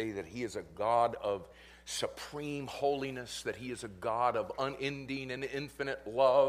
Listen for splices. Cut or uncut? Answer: uncut